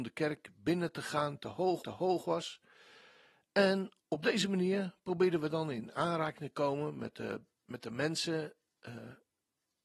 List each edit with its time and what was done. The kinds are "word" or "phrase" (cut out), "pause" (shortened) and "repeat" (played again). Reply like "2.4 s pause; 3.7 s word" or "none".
1.8 s repeat; 4.0 s pause; 7.5 s pause

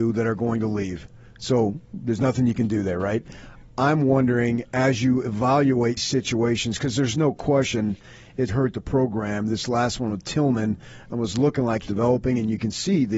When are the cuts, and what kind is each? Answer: 6.0 s word; 8.5 s word; 11.9 s word

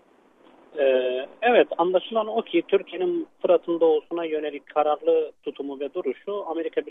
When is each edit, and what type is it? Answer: none

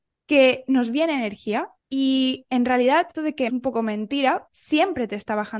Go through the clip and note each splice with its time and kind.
1.8 s pause; 3.1 s word; 3.5 s phrase; 4.5 s word

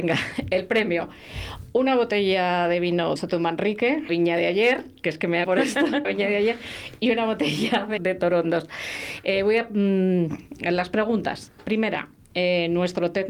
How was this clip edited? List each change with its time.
3.2 s word; 4.1 s word; 5.4 s word; 6.0 s word; 8.0 s word

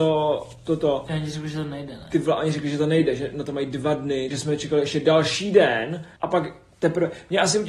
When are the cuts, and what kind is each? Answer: 4.3 s word; 6.2 s pause

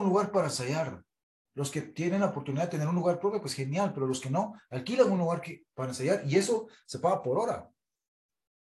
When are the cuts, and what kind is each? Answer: none

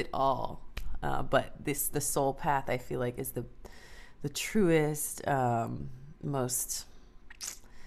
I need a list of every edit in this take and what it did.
none

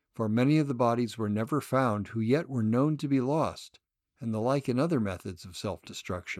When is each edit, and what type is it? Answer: 3.9 s pause

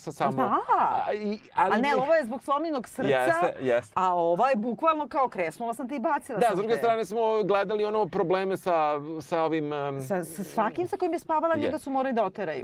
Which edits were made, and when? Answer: none

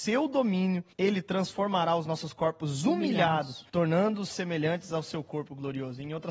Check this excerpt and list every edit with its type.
0.9 s pause; 3.7 s pause

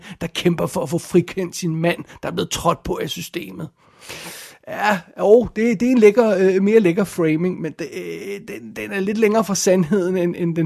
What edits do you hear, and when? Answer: none

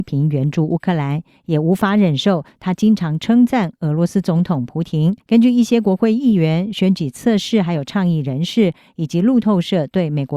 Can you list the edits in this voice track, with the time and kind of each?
5.2 s pause

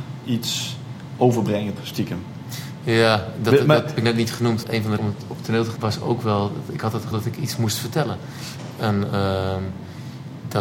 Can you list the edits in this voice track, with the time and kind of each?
1.8 s word; 4.0 s word; 4.6 s word; 5.0 s word; 5.8 s word; 7.1 s word

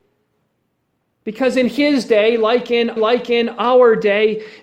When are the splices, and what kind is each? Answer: 3.0 s repeat

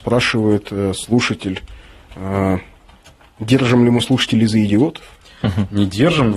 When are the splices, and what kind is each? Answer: none

